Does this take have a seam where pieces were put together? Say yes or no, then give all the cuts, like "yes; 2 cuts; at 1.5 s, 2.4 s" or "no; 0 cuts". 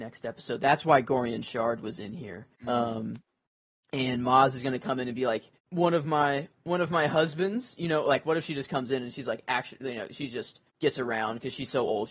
yes; 3 cuts; at 2.5 s, 5.6 s, 10.7 s